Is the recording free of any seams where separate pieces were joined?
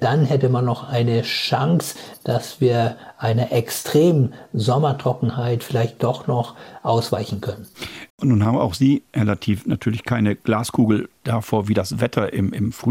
no; 1 cut; at 8.1 s

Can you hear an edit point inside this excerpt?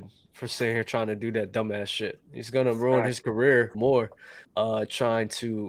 yes; 2 cuts; at 3.7 s, 4.4 s

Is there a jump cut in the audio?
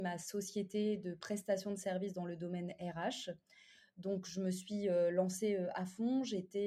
no; 0 cuts

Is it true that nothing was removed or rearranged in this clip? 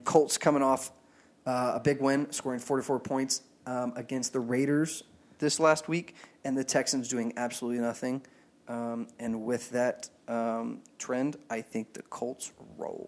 yes; 0 cuts

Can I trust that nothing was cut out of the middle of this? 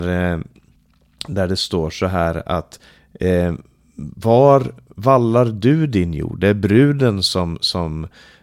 yes; 0 cuts

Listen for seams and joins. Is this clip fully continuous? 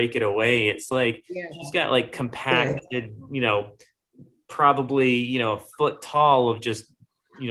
yes; 0 cuts

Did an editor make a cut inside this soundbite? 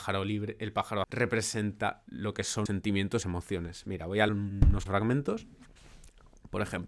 yes; 5 cuts; at 1.0 s, 2.7 s, 3.2 s, 4.3 s, 4.9 s

